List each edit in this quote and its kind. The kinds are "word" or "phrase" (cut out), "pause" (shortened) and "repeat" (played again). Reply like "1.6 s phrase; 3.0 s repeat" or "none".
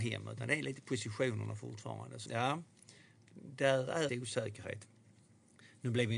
2.3 s word; 4.1 s phrase